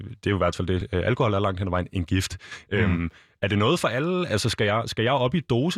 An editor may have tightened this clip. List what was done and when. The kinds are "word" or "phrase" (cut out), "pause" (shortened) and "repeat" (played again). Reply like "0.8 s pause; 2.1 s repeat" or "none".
none